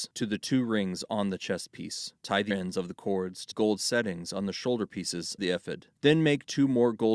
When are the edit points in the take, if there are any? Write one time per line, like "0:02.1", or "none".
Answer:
0:02.2
0:02.5
0:03.5
0:05.4
0:06.0